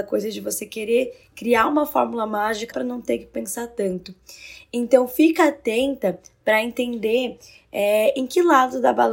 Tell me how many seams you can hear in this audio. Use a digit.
1